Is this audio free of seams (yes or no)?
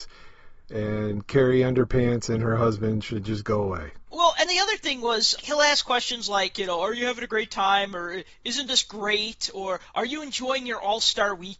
no